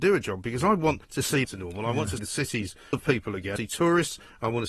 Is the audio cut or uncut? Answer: cut